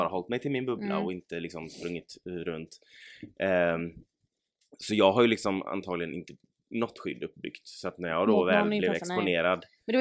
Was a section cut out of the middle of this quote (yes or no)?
no